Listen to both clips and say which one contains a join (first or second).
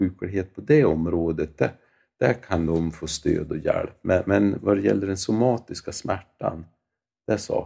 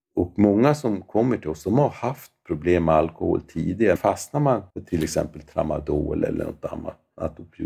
second